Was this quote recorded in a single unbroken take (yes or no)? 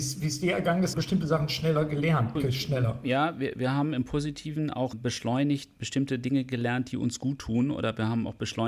no